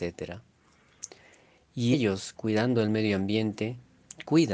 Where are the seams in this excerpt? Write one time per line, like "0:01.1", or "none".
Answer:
0:01.9